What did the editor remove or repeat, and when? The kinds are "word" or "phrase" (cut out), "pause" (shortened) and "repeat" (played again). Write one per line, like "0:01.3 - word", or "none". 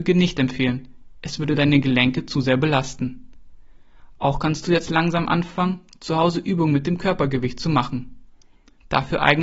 none